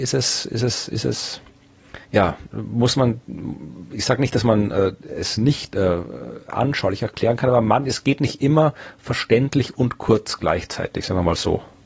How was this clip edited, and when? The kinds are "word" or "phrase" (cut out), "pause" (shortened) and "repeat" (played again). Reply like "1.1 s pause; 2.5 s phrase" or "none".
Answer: 2.0 s pause